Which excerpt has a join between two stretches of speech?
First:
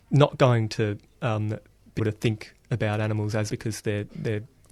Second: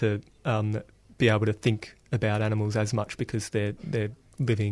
first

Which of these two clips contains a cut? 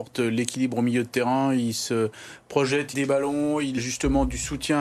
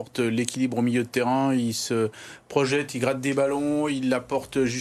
first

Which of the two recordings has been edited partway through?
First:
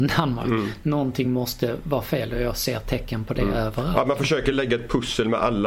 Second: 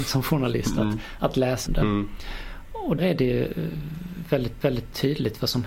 second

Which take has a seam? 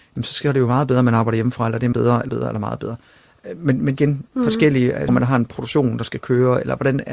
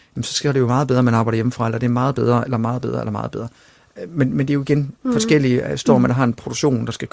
first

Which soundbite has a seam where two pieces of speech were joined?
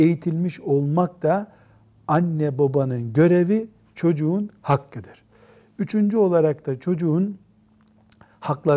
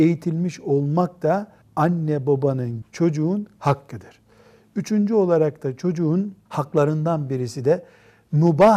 second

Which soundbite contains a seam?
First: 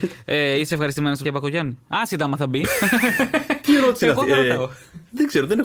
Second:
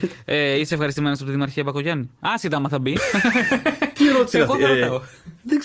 first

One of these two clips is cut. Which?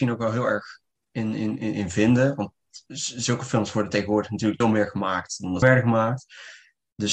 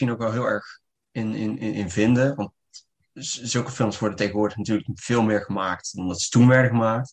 first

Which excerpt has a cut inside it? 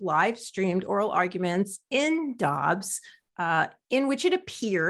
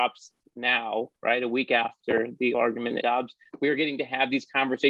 second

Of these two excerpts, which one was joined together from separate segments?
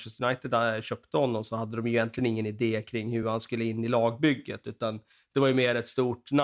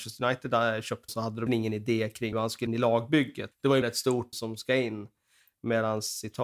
second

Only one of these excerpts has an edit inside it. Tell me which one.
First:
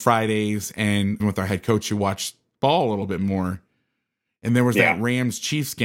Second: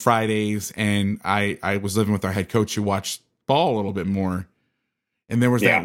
first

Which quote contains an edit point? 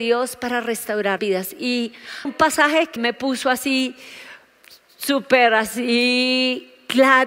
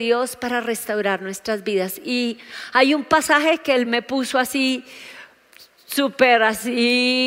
first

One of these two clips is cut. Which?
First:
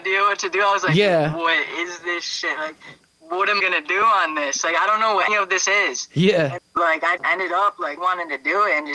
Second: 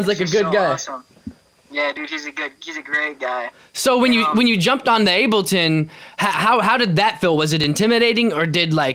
first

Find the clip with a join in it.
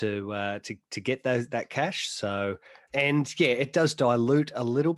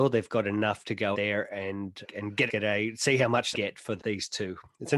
second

